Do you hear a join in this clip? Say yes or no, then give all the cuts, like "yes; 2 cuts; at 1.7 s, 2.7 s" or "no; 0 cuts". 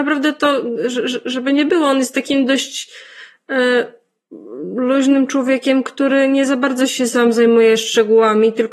no; 0 cuts